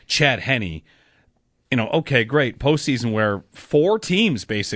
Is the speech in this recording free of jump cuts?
yes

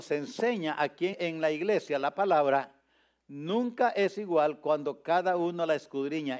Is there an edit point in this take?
yes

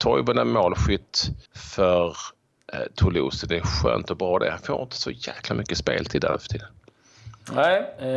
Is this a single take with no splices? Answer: no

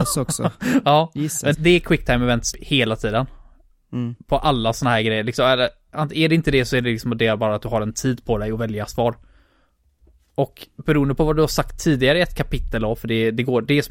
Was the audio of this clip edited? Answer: yes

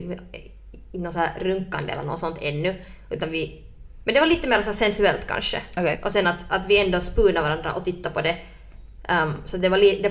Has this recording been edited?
no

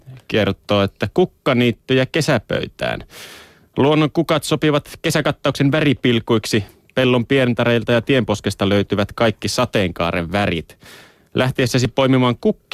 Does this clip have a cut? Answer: no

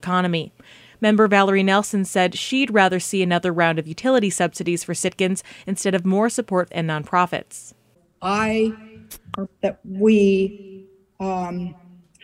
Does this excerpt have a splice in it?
yes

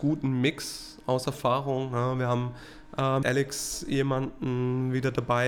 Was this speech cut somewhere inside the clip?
yes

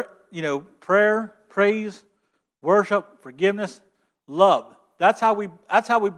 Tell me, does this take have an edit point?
no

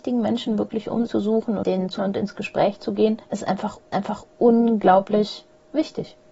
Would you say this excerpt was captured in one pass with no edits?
no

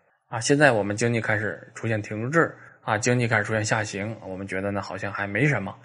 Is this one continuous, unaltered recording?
no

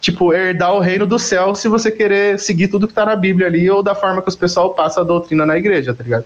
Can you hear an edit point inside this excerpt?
no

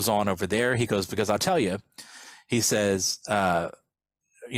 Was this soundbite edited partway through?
no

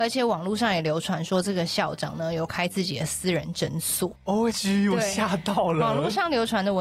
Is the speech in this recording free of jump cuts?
no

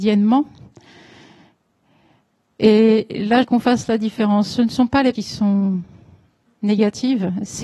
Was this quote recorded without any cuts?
no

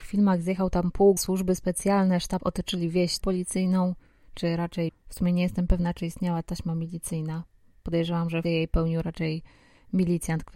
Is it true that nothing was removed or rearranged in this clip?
no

